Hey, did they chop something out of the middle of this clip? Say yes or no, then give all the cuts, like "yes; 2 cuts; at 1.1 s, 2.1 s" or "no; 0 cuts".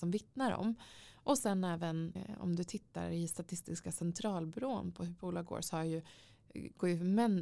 yes; 1 cut; at 2.2 s